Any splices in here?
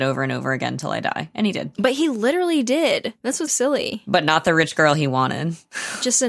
yes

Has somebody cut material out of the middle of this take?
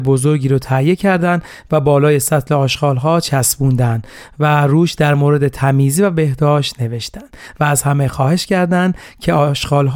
no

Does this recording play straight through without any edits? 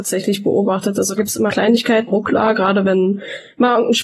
no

